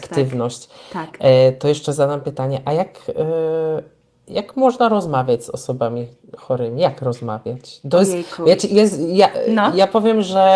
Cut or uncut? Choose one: uncut